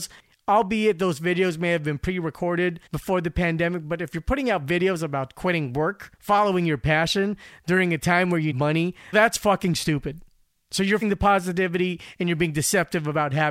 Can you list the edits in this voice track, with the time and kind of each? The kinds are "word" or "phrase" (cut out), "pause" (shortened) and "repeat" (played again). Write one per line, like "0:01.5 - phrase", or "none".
0:02.9 - pause
0:06.1 - pause
0:08.5 - word
0:09.1 - word
0:10.4 - pause
0:11.0 - word